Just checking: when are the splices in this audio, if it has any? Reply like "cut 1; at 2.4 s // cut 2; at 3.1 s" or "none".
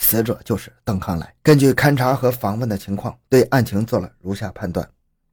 cut 1; at 1.4 s

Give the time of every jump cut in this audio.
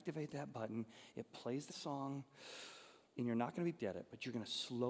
cut 1; at 1.7 s // cut 2; at 3.0 s // cut 3; at 3.8 s

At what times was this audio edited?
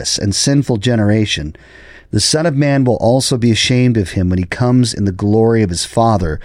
none

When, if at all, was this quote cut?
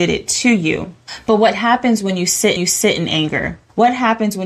cut 1; at 2.6 s

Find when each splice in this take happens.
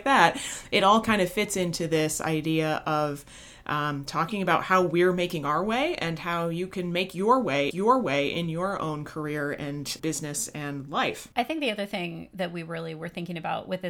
cut 1; at 7.7 s // cut 2; at 10.0 s // cut 3; at 11.3 s

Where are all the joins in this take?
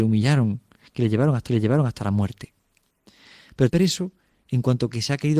cut 1; at 1.5 s // cut 2; at 3.7 s

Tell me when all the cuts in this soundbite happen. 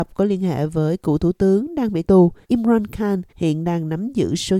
cut 1; at 2.0 s // cut 2; at 2.4 s // cut 3; at 3.3 s

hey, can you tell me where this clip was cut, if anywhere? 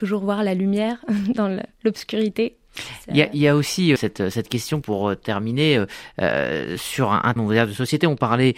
cut 1; at 4.0 s // cut 2; at 4.8 s // cut 3; at 7.4 s

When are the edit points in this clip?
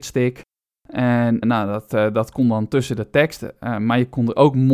cut 1; at 1.4 s

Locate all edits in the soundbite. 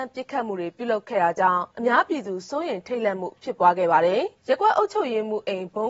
cut 1; at 1.7 s // cut 2; at 4.4 s

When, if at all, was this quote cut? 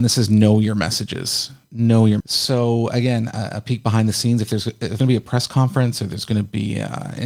cut 1; at 2.2 s // cut 2; at 5.0 s

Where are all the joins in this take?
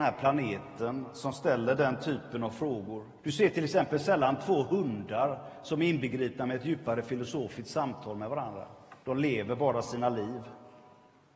cut 1; at 3.2 s // cut 2; at 9.0 s

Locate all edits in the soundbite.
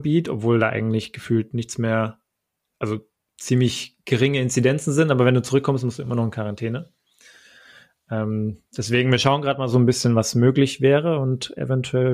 none

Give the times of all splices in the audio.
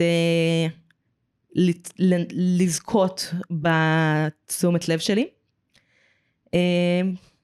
none

